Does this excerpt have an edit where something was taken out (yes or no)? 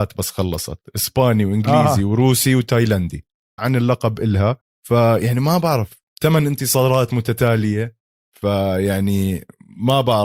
yes